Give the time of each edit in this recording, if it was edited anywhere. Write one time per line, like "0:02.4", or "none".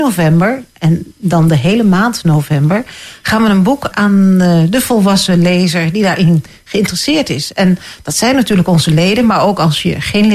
0:03.9